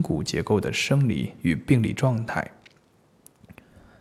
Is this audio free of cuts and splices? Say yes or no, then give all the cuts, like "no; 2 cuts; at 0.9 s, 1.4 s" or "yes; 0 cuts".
no; 1 cut; at 1.4 s